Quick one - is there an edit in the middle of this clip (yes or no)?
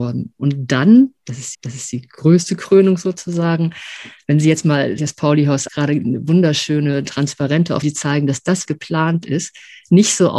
yes